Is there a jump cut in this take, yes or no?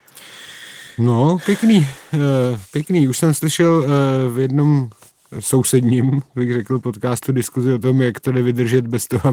no